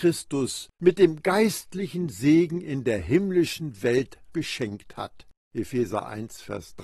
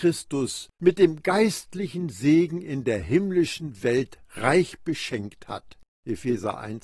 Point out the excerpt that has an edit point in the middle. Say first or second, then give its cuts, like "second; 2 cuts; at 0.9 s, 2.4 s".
first; 1 cut; at 4.3 s